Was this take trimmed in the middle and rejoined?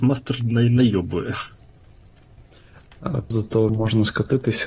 yes; 2 cuts; at 3.3 s, 3.7 s

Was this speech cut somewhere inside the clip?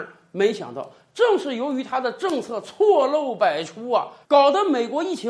yes; 1 cut; at 4.2 s

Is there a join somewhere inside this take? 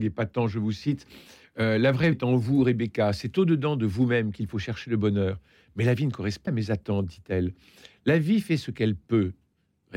yes; 2 cuts; at 2.1 s, 6.5 s

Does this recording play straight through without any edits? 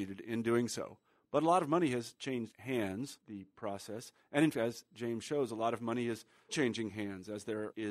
no; 3 cuts; at 3.2 s, 4.5 s, 6.5 s

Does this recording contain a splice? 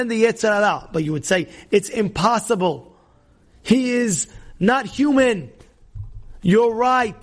no; 0 cuts

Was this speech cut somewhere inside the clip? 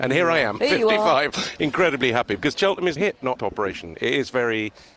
yes; 2 cuts; at 3.0 s, 3.3 s

